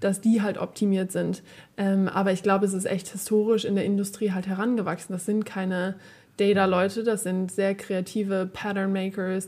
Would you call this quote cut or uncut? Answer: uncut